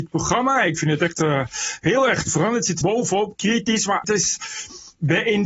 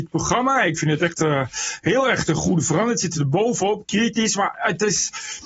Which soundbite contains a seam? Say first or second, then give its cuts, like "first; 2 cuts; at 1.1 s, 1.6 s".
first; 3 cuts; at 2.3 s, 2.8 s, 4.0 s